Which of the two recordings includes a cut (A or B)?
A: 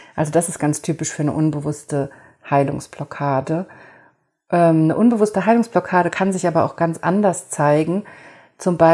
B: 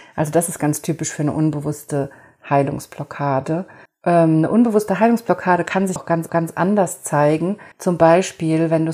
B